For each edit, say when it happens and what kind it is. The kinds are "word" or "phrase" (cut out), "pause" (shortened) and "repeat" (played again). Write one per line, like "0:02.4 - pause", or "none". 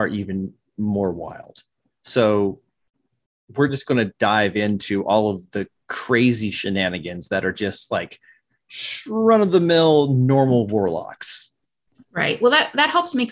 none